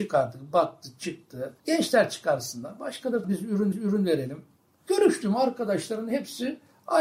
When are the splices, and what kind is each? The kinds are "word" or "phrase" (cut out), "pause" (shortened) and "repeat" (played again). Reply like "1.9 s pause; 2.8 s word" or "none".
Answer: 1.6 s pause; 3.2 s word; 3.7 s repeat